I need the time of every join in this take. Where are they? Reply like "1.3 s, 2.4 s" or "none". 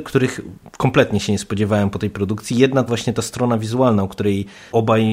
2.9 s